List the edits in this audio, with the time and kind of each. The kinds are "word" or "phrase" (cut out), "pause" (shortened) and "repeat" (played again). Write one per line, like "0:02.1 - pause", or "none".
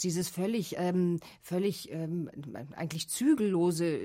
none